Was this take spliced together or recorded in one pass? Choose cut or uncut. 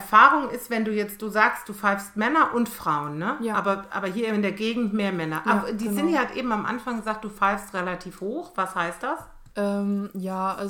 cut